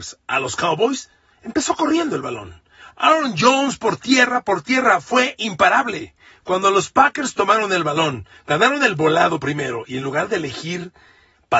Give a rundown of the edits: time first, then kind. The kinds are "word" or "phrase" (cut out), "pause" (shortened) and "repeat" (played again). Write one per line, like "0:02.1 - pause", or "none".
none